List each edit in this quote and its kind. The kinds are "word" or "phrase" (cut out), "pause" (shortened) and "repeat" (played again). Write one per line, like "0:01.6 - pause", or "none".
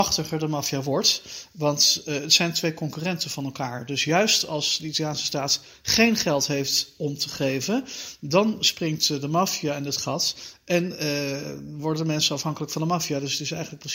none